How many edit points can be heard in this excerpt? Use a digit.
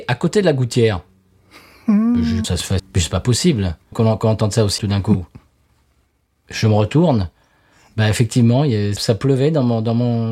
5